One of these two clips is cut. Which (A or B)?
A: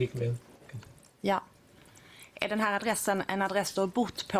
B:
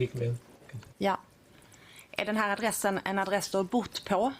B